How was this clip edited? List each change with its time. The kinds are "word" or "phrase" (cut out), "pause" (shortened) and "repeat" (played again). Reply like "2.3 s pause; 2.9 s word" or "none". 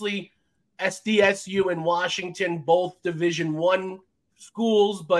none